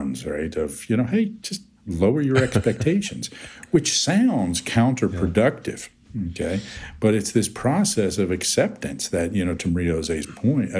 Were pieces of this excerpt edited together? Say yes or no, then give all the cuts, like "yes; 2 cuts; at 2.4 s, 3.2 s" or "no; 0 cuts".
no; 0 cuts